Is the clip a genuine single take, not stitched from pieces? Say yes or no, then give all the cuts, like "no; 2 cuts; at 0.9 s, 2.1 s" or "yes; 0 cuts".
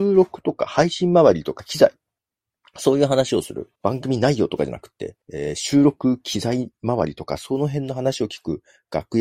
no; 3 cuts; at 2.2 s, 3.8 s, 5.2 s